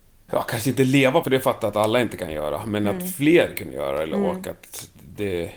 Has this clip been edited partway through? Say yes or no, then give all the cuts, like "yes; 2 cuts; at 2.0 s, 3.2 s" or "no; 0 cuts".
yes; 1 cut; at 1.2 s